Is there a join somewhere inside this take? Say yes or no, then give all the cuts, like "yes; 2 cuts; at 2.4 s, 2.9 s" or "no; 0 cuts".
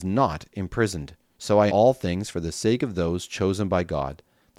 yes; 2 cuts; at 1.3 s, 1.7 s